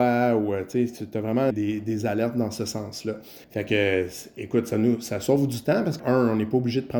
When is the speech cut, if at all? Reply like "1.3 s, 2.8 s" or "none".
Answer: 1.5 s, 3.4 s, 6.0 s